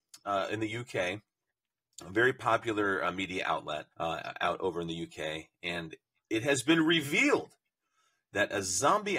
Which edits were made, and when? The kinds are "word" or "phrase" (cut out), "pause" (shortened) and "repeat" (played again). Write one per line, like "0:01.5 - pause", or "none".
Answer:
0:03.9 - pause